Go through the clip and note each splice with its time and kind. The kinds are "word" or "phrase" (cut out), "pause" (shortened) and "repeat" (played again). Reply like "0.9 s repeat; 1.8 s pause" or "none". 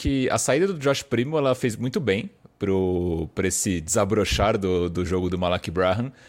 none